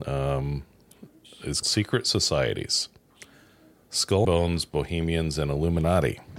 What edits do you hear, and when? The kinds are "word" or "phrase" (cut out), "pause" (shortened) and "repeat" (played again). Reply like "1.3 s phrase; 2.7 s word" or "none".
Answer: 1.6 s word; 4.2 s word

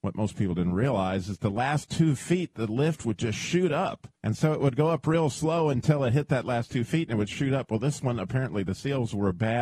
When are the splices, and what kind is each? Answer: 4.2 s pause

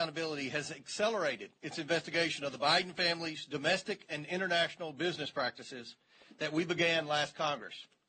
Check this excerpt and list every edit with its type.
none

